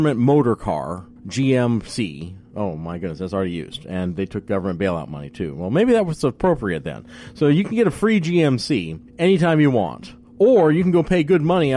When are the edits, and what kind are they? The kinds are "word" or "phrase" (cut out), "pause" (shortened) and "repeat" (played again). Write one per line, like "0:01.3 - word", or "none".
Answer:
0:01.2 - pause
0:09.1 - pause